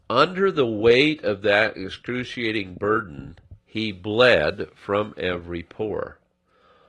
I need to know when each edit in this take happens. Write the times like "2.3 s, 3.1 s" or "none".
3.6 s